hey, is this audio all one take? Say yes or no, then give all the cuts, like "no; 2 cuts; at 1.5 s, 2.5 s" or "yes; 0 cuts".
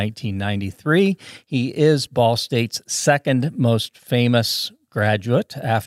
yes; 0 cuts